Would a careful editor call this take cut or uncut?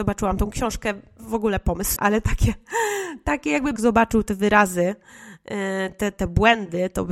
cut